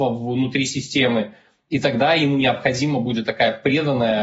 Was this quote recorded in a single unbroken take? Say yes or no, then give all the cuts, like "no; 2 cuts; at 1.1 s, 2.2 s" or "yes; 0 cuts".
yes; 0 cuts